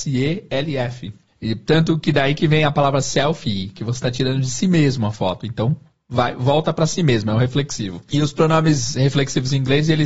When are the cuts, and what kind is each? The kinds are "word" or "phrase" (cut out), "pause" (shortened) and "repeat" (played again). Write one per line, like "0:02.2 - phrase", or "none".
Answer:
none